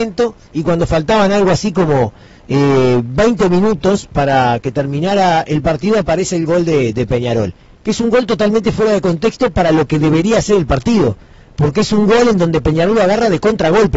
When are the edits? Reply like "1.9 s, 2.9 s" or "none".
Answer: none